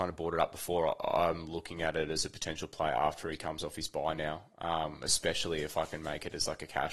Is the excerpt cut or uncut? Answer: uncut